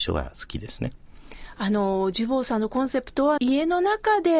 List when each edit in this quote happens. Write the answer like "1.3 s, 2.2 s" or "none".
3.4 s